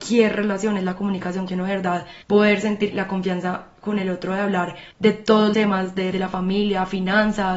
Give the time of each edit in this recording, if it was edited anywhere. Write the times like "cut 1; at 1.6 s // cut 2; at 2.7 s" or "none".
cut 1; at 1.5 s // cut 2; at 2.2 s // cut 3; at 2.9 s // cut 4; at 4.9 s // cut 5; at 5.5 s // cut 6; at 6.1 s